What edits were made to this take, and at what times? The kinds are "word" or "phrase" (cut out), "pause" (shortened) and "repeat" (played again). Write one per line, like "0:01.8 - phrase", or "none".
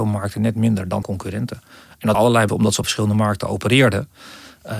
0:01.0 - word
0:02.1 - word
0:02.5 - word
0:02.8 - word